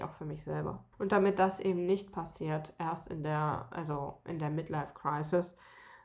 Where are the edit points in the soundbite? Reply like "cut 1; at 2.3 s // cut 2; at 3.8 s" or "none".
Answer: cut 1; at 0.9 s